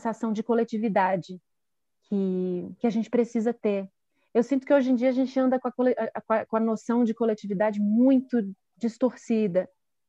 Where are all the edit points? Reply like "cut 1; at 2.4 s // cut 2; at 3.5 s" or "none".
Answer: none